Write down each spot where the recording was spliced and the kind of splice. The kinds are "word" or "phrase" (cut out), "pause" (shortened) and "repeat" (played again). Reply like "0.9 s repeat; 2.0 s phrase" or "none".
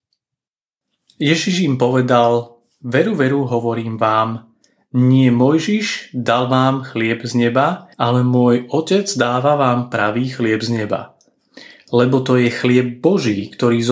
7.9 s pause